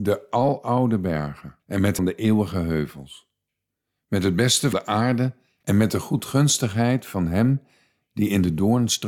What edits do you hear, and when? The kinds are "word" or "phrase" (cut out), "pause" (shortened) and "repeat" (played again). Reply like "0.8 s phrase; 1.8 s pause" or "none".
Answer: 1.6 s pause; 2.0 s phrase; 4.7 s word; 5.6 s phrase

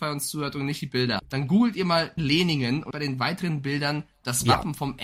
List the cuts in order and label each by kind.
1.2 s word; 2.2 s word; 2.9 s word

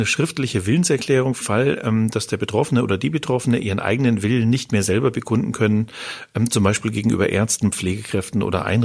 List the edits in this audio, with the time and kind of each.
1.4 s word

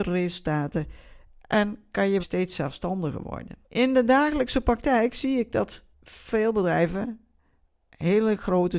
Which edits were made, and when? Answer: 2.2 s word; 3.6 s pause; 5.9 s pause

